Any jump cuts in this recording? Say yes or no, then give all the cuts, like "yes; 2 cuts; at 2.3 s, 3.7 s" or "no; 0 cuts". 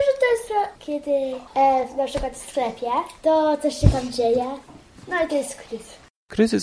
no; 0 cuts